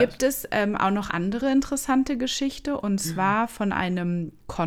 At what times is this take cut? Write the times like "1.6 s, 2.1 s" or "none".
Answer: 1.1 s

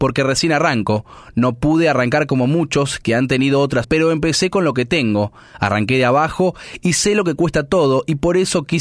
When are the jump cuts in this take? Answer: 3.8 s

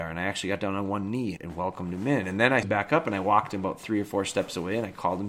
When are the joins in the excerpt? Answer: 1.4 s, 2.6 s

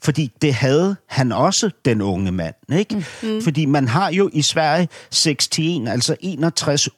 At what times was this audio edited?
none

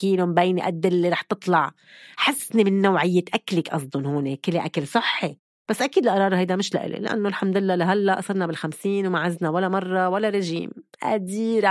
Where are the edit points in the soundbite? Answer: none

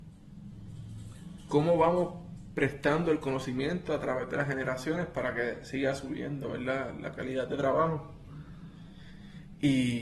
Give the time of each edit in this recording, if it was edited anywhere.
none

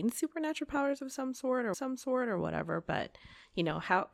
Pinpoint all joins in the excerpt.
1.7 s

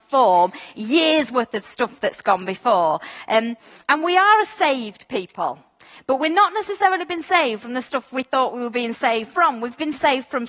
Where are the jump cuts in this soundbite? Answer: none

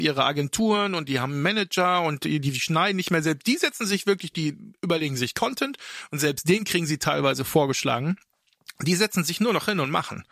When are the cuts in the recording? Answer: none

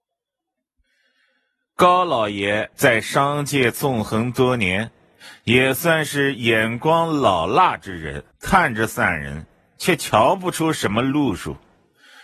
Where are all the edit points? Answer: 2.7 s, 8.3 s

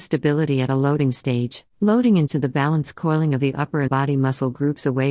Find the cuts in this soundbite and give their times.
1.7 s, 2.3 s, 3.9 s

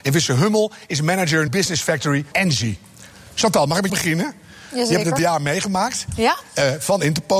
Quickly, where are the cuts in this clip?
1.5 s, 2.3 s, 3.9 s, 5.2 s

